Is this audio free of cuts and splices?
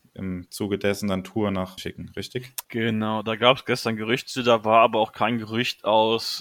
no; 2 cuts; at 1.8 s, 2.6 s

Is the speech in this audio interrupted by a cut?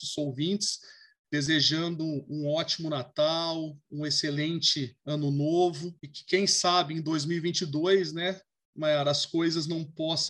yes; 2 cuts; at 5.0 s, 6.0 s

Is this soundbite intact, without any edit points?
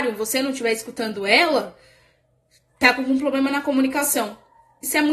yes; 0 cuts

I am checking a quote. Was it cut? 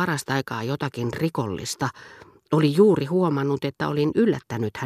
no; 0 cuts

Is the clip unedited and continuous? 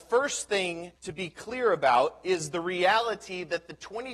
no; 1 cut; at 1.0 s

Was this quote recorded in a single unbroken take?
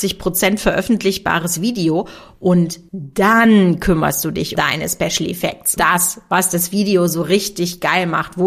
no; 2 cuts; at 4.6 s, 5.8 s

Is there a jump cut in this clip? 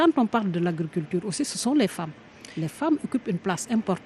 no; 0 cuts

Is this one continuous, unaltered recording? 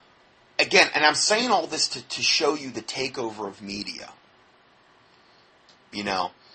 yes; 0 cuts

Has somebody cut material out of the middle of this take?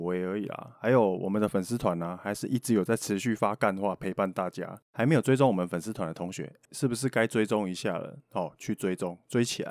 yes; 2 cuts; at 4.8 s, 6.6 s

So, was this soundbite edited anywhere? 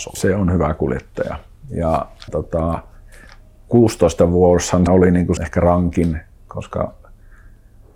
yes; 3 cuts; at 2.3 s, 4.9 s, 5.4 s

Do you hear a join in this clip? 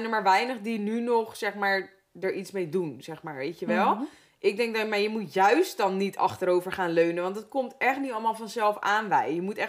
no; 0 cuts

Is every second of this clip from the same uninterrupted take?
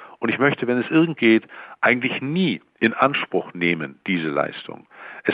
yes; 0 cuts

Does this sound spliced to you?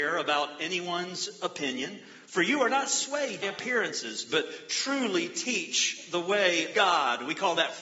yes; 2 cuts; at 3.4 s, 6.7 s

